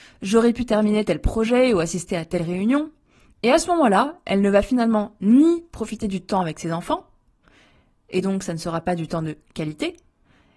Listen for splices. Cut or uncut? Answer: uncut